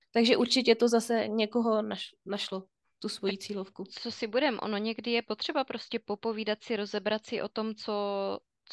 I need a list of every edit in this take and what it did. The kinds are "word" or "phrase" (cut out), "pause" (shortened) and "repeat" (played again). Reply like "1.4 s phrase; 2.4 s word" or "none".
none